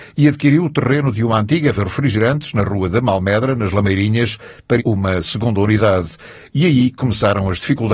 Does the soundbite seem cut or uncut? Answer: cut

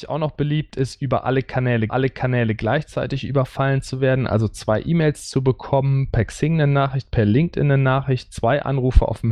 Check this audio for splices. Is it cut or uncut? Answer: cut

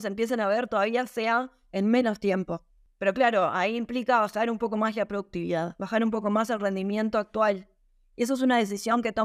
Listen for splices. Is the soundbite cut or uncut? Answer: uncut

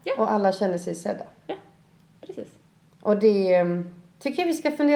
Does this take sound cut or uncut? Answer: uncut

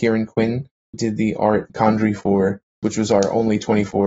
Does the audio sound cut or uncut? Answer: cut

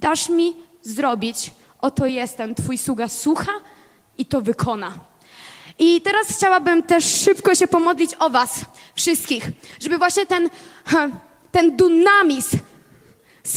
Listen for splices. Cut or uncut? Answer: uncut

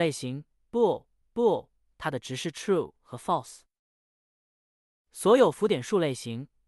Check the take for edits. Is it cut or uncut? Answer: cut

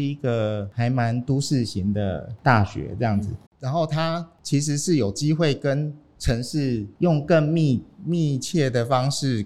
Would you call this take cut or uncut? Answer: cut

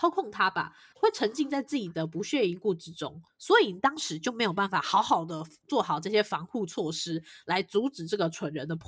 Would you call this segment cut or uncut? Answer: uncut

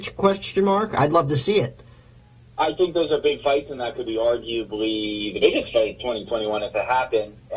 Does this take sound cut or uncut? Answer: uncut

